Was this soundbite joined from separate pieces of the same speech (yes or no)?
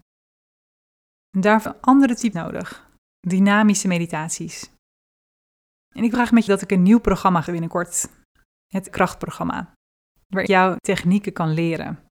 yes